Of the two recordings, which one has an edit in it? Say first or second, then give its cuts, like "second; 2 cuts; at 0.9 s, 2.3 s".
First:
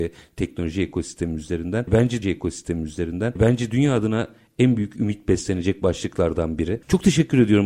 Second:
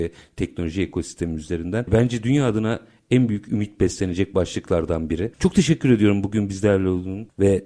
first; 1 cut; at 2.2 s